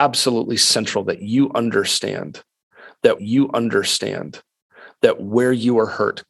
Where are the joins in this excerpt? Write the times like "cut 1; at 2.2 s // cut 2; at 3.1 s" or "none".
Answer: cut 1; at 3.2 s